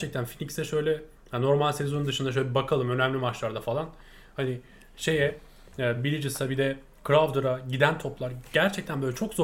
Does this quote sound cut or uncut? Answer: uncut